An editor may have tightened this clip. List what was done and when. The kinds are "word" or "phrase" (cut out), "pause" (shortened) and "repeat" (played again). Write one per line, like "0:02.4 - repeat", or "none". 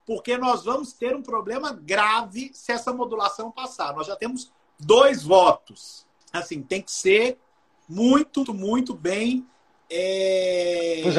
0:06.2 - pause
0:08.4 - word